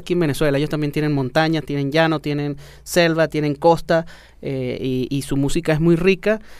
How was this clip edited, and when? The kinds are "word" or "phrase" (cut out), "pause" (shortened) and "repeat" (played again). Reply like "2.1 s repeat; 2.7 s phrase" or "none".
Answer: none